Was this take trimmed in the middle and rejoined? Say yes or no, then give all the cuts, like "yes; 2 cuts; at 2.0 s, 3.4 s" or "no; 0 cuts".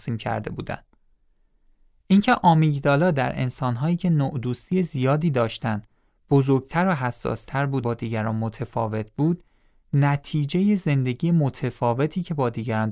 yes; 1 cut; at 7.8 s